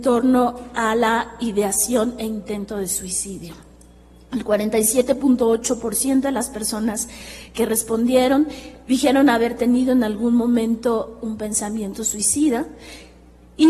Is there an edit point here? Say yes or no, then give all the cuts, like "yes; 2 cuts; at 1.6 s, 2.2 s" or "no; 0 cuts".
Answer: no; 0 cuts